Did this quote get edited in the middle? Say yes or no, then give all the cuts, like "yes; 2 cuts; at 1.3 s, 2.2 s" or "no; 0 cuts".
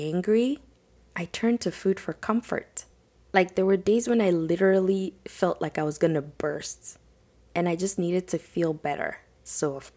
no; 0 cuts